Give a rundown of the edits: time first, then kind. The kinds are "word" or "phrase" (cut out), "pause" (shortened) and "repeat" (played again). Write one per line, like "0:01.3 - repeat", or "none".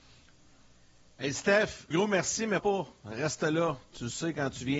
0:01.9 - word
0:02.6 - word

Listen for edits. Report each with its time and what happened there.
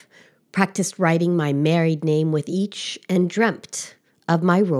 none

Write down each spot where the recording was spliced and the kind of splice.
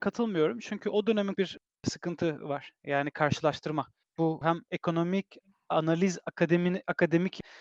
0:01.3 - phrase

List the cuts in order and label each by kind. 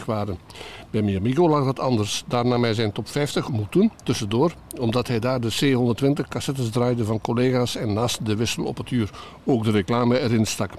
0:03.5 - phrase
0:03.9 - pause

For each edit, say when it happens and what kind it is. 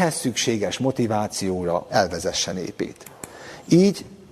0:01.9 - phrase

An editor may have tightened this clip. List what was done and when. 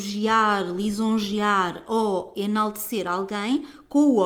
none

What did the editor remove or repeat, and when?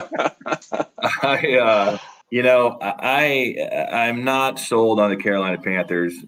0:02.2 - pause

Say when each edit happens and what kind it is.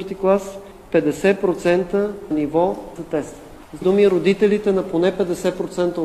0:02.3 - word
0:03.0 - phrase
0:03.8 - word

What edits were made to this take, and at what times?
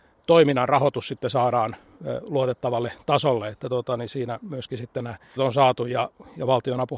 0:05.4 - word

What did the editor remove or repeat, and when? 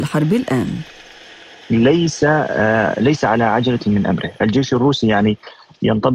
none

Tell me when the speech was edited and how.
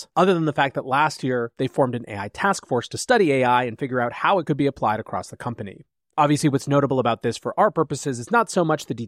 none

